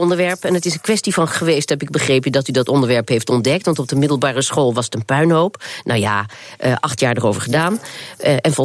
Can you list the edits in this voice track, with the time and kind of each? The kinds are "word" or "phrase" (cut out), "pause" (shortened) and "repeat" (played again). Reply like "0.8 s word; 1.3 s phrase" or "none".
1.3 s word